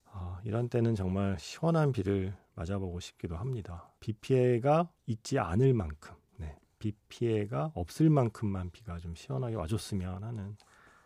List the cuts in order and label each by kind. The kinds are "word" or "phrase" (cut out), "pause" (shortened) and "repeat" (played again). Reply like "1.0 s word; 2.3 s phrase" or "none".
2.5 s pause; 4.0 s pause; 5.0 s pause